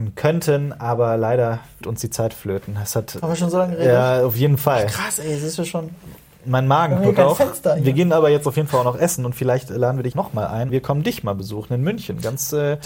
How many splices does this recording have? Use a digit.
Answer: 3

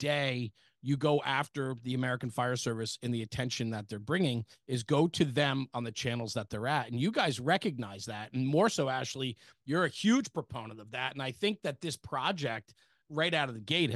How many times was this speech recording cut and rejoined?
0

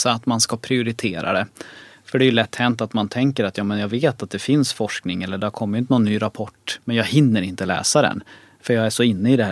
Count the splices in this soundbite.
0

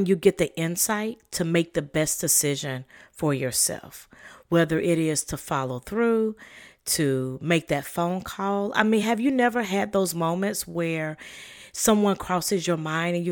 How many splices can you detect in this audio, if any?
0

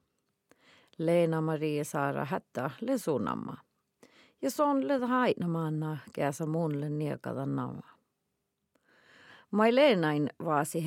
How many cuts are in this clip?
0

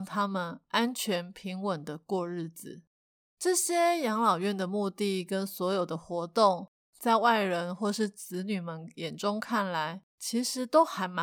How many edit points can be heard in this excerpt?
0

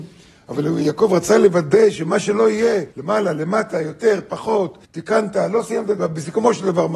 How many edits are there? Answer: 3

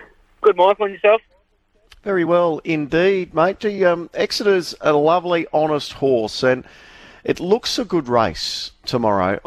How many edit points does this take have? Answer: 0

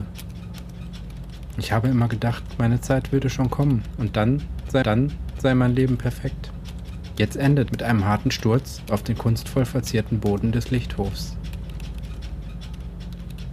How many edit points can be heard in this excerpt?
2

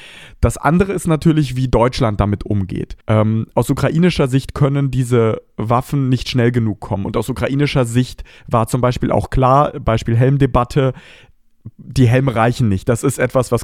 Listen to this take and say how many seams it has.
1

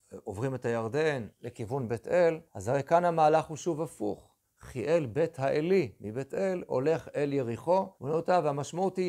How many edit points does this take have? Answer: 3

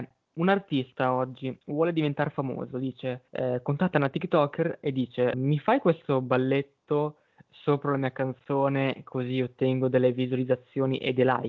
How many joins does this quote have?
3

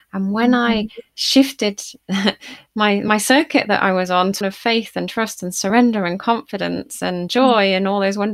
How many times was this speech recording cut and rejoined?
1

